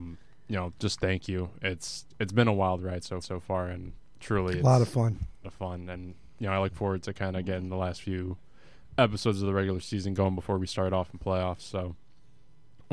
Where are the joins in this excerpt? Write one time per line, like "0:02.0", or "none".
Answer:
0:03.2
0:05.4